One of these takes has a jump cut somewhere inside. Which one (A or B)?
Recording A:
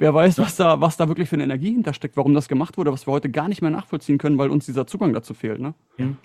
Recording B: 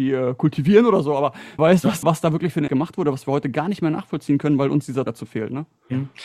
B